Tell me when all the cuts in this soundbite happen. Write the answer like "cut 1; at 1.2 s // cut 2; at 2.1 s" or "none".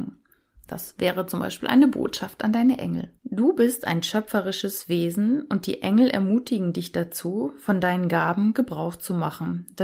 cut 1; at 3.2 s